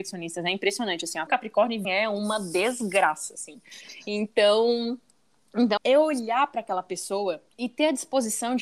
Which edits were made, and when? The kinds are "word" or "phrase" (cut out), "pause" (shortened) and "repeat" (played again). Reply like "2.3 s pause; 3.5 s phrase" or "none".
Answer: 1.3 s word; 1.8 s word; 5.8 s word